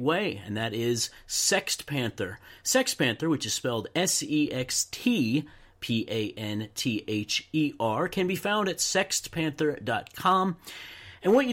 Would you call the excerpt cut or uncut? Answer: uncut